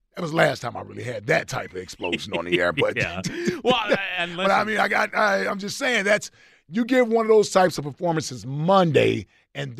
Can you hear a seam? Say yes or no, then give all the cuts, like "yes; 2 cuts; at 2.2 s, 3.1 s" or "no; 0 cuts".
no; 0 cuts